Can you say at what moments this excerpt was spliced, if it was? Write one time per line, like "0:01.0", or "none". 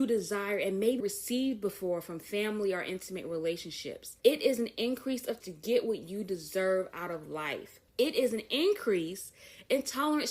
0:01.0
0:04.2
0:05.4
0:07.9